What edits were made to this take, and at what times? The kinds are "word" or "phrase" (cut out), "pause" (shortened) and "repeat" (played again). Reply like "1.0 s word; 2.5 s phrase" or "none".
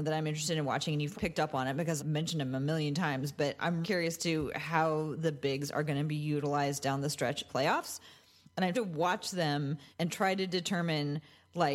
1.1 s word; 2.0 s word; 3.8 s word; 7.5 s phrase; 8.7 s word; 9.9 s pause